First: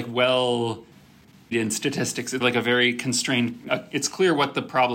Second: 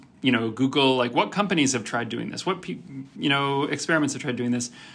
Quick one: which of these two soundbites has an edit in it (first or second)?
first